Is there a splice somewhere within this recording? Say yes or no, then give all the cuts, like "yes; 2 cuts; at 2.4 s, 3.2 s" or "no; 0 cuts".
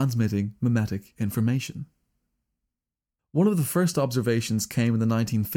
no; 0 cuts